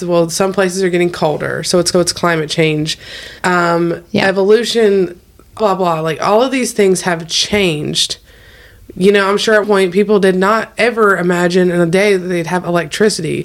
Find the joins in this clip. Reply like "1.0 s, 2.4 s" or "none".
1.9 s, 3.4 s, 5.6 s, 9.6 s